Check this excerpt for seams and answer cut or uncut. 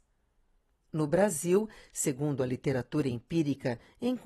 uncut